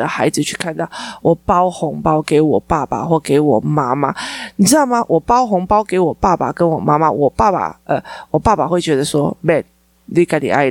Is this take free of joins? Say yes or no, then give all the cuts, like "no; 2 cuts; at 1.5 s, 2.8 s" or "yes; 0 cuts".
yes; 0 cuts